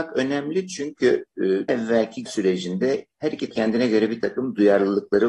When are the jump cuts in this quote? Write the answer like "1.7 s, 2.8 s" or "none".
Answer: 1.7 s, 2.3 s, 3.5 s